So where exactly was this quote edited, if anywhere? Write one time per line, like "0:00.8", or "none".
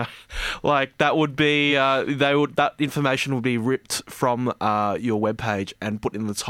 none